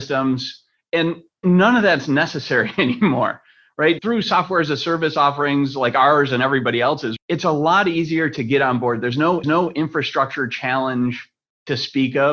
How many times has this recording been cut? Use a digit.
3